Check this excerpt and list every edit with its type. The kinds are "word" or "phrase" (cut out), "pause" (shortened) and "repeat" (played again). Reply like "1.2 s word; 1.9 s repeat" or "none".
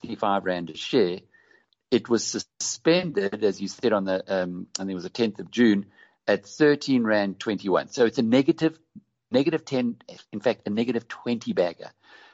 none